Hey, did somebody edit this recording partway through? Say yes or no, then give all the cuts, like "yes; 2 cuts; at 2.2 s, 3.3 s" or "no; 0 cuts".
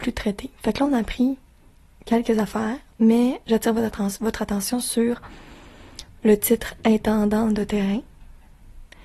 no; 0 cuts